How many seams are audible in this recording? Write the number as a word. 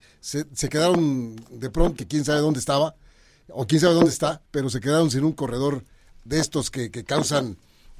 two